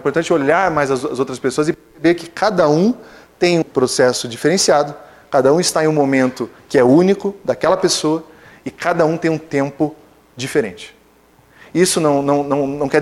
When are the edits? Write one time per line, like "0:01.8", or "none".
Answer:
0:03.6